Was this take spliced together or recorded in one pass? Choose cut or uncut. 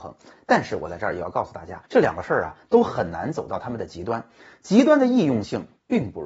cut